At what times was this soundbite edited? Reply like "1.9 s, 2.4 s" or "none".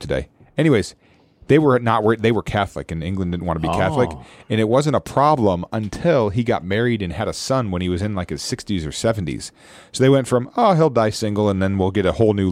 none